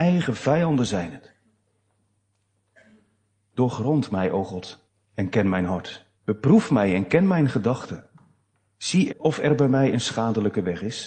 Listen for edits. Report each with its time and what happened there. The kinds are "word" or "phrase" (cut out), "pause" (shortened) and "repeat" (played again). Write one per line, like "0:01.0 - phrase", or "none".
0:04.9 - pause
0:06.1 - pause
0:09.1 - word

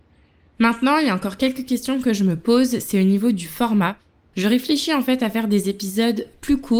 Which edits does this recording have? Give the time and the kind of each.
none

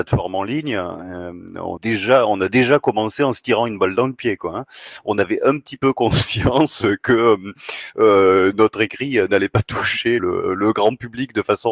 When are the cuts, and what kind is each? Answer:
0:01.8 - word
0:10.2 - word

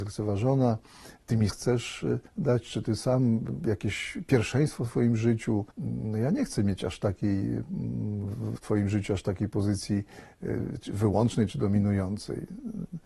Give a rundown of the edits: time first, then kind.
0:01.5 - word
0:02.3 - pause
0:05.7 - pause
0:08.6 - word

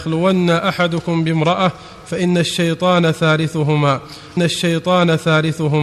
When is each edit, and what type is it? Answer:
0:04.4 - repeat

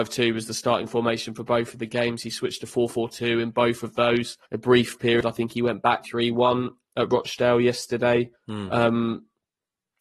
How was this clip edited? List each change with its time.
0:04.4 - pause
0:06.0 - phrase
0:08.3 - pause

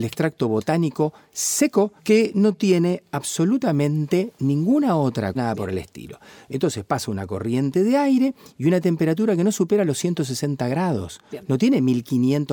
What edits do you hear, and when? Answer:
0:02.0 - pause
0:05.3 - phrase

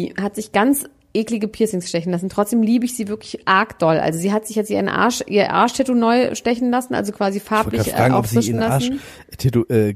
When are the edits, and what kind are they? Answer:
none

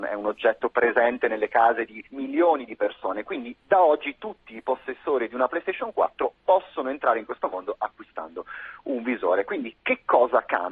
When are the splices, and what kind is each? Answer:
0:02.1 - pause

